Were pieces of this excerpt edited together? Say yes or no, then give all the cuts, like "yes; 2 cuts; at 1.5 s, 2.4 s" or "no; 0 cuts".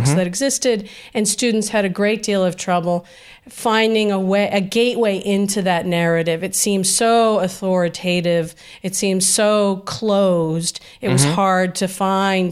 no; 0 cuts